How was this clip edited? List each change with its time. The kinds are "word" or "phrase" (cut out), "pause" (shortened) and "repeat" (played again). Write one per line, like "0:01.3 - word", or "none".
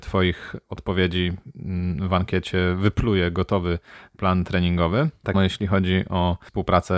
0:05.3 - word